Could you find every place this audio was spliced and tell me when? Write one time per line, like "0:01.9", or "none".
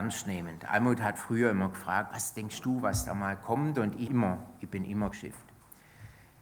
0:01.2
0:02.1
0:04.1
0:05.1